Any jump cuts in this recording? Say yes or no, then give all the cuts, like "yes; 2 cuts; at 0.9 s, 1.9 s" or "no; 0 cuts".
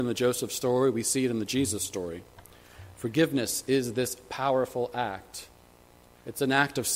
no; 0 cuts